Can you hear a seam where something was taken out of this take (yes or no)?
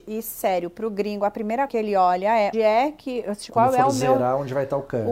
yes